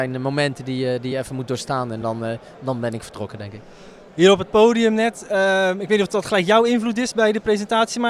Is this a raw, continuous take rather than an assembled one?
yes; 0 cuts

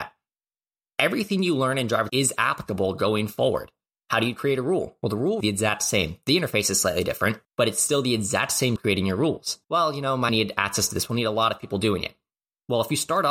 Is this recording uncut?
no; 6 cuts; at 2.1 s, 5.4 s, 7.4 s, 8.8 s, 9.6 s, 10.3 s

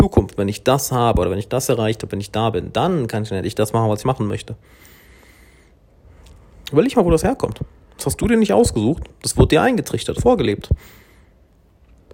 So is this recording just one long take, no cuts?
no; 2 cuts; at 4.0 s, 10.2 s

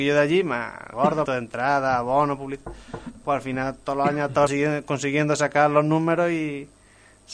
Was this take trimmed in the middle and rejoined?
yes; 3 cuts; at 0.9 s, 1.3 s, 4.5 s

